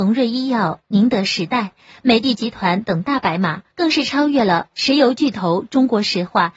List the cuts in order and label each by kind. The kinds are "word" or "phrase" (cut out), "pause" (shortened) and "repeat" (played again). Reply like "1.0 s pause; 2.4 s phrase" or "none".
3.7 s pause